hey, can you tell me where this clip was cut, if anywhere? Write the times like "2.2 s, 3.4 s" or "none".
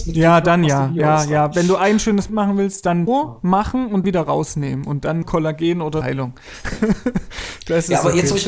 2.3 s, 3.1 s, 4.0 s, 5.2 s, 6.0 s